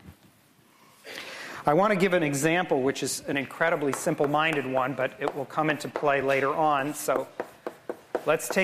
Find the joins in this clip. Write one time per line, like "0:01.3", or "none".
none